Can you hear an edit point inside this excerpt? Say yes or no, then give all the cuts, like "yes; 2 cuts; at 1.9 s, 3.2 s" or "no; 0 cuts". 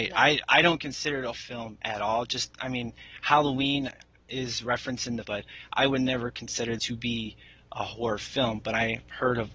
yes; 3 cuts; at 1.3 s, 5.2 s, 6.8 s